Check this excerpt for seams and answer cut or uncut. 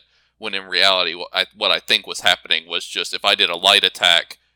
uncut